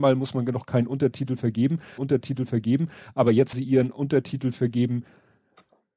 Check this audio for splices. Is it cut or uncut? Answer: cut